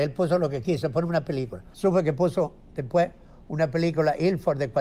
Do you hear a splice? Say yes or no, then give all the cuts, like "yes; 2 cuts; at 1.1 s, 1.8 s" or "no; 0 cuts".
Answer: no; 0 cuts